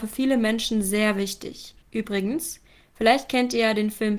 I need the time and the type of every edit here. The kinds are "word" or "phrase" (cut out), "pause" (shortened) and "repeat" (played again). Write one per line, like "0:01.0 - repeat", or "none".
0:01.8 - pause